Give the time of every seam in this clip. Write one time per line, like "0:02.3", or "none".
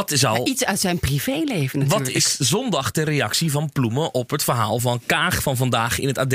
none